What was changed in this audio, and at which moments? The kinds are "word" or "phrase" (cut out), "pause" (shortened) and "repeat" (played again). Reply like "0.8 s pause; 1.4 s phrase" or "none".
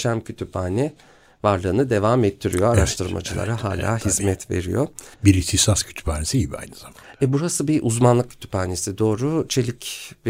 5.1 s pause